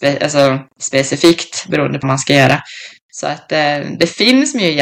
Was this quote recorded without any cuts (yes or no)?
no